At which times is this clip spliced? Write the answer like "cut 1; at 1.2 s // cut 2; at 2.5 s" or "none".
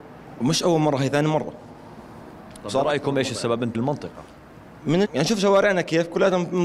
cut 1; at 3.7 s // cut 2; at 5.0 s